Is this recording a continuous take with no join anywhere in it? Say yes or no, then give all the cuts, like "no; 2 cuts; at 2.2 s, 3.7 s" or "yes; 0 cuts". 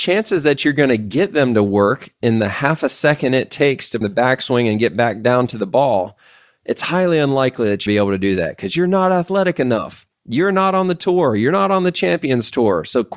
no; 2 cuts; at 4.0 s, 7.9 s